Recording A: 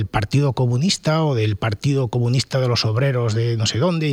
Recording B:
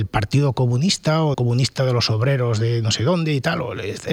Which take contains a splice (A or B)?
B